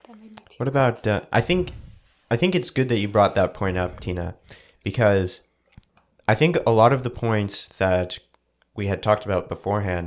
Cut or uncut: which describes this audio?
uncut